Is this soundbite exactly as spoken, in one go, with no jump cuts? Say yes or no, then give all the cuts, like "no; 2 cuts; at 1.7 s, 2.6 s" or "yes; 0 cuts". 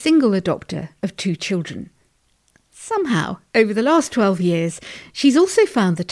yes; 0 cuts